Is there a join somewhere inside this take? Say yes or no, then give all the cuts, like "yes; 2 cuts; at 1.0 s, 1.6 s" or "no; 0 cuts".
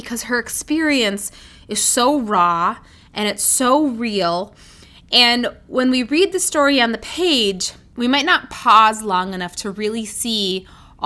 no; 0 cuts